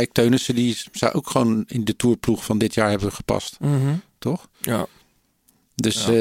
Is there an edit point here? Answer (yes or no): yes